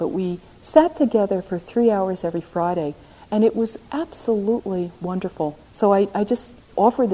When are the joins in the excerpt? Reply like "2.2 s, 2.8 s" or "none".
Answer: 5.6 s